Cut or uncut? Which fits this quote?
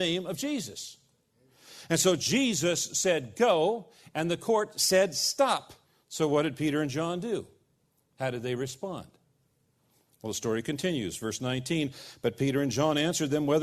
cut